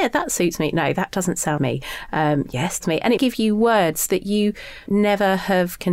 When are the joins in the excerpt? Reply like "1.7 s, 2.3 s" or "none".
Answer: 1.6 s, 2.8 s, 3.2 s, 4.9 s